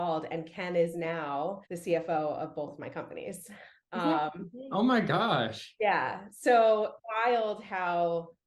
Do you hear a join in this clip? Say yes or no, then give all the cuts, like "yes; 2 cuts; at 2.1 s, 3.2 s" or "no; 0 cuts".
yes; 2 cuts; at 1.7 s, 7.0 s